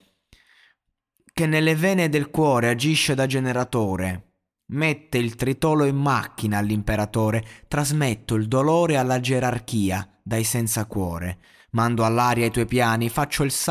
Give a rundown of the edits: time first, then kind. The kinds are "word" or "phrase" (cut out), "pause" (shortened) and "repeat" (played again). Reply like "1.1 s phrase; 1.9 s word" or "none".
none